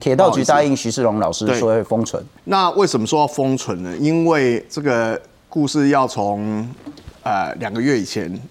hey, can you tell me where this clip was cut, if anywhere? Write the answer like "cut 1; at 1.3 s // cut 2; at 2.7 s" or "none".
cut 1; at 2.4 s // cut 2; at 7.2 s